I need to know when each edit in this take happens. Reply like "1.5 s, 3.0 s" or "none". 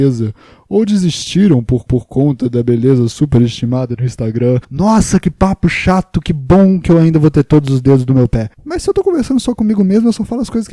1.9 s, 4.6 s, 8.5 s